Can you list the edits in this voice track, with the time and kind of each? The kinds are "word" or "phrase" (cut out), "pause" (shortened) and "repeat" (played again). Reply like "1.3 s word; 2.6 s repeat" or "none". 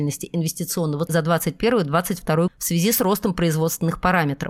1.1 s phrase; 2.5 s word